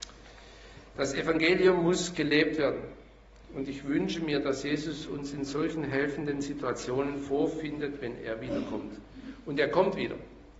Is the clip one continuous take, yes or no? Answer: yes